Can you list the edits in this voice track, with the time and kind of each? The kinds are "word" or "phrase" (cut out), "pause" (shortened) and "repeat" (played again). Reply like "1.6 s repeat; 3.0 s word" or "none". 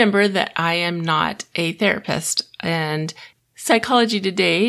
3.4 s word